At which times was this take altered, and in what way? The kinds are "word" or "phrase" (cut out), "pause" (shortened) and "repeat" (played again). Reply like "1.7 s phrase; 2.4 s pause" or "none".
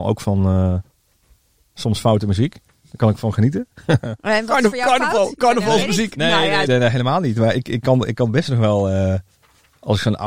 6.7 s word